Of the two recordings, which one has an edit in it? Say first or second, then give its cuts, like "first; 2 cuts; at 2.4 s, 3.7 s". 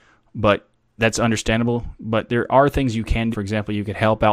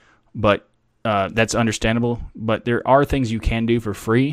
first; 2 cuts; at 1.0 s, 3.3 s